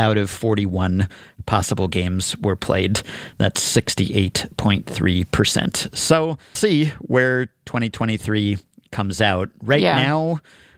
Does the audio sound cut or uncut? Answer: cut